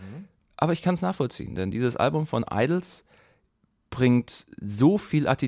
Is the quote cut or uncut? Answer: uncut